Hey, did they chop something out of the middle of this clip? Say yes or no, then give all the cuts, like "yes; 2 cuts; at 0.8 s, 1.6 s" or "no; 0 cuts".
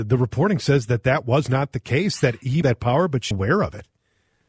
yes; 2 cuts; at 2.6 s, 3.3 s